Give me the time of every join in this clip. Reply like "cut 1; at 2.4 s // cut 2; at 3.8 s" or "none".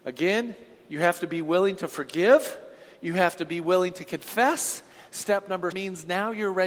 cut 1; at 5.7 s